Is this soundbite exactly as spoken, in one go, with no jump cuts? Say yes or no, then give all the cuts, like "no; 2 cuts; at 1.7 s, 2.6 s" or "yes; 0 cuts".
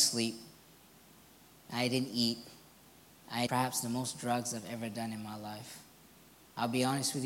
no; 1 cut; at 3.5 s